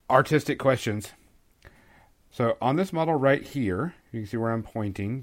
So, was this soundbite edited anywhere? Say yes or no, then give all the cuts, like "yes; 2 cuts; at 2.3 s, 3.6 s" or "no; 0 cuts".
yes; 1 cut; at 4.0 s